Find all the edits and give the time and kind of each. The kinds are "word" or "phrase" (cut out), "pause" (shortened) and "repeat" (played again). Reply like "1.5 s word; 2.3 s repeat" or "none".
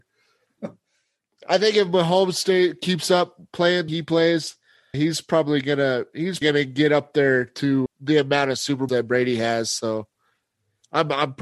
3.9 s word; 4.9 s word; 6.4 s word; 7.9 s word; 8.9 s word